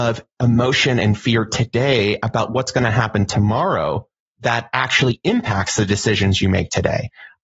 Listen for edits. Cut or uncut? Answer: uncut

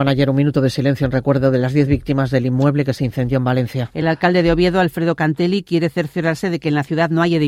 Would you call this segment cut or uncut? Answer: uncut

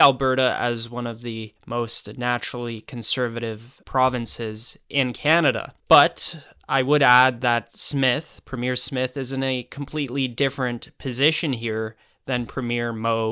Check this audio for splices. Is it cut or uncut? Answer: uncut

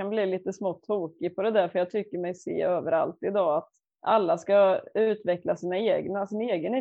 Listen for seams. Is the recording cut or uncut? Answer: uncut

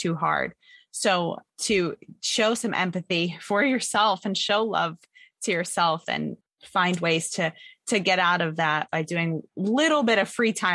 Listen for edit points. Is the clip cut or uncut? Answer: cut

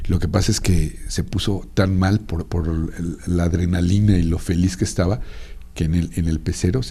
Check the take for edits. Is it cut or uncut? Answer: cut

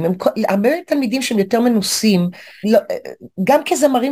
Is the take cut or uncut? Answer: cut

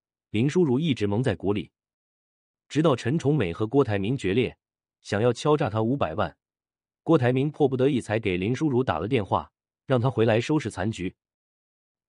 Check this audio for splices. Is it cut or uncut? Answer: uncut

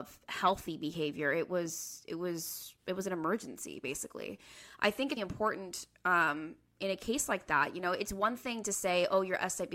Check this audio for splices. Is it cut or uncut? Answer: cut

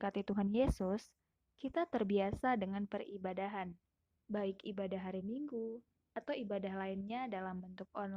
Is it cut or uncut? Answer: uncut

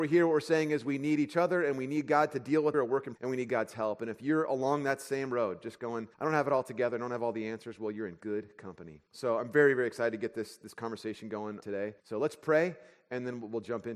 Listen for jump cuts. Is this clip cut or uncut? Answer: cut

